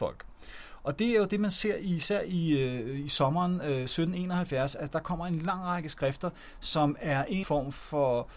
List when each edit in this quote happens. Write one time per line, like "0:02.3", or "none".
0:07.4